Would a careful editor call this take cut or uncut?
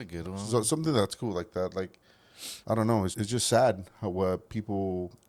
cut